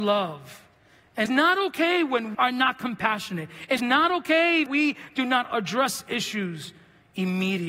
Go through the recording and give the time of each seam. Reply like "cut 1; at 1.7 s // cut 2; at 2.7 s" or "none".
cut 1; at 1.3 s // cut 2; at 2.3 s // cut 3; at 3.8 s // cut 4; at 4.7 s